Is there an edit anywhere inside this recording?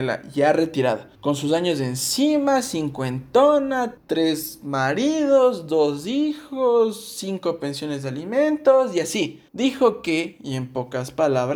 yes; 3 cuts; at 1.1 s, 4.0 s, 9.5 s

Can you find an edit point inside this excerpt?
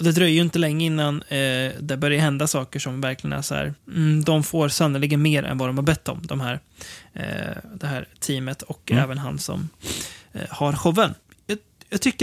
yes; 1 cut; at 3.8 s

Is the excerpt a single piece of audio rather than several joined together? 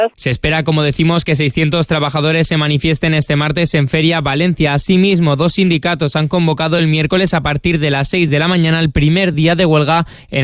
yes; 0 cuts

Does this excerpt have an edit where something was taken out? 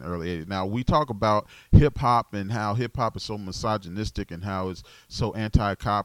no; 0 cuts

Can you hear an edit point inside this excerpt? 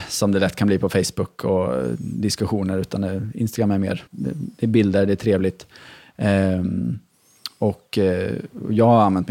yes; 1 cut; at 4.1 s

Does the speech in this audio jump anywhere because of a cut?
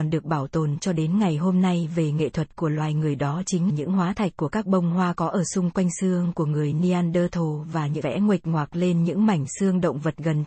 yes; 2 cuts; at 3.7 s, 8.0 s

